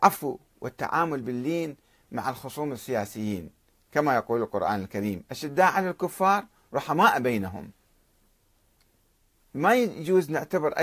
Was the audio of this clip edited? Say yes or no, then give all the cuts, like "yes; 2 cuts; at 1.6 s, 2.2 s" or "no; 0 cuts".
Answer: no; 0 cuts